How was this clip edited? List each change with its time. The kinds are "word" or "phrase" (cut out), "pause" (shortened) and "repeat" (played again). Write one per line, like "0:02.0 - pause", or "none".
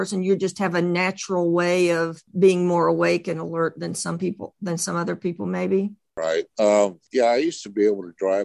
0:06.5 - pause